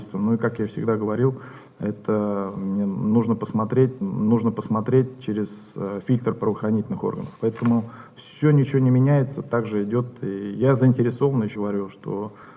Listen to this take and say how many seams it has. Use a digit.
3